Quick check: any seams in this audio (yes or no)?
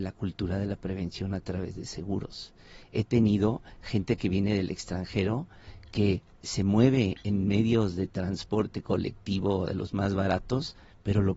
no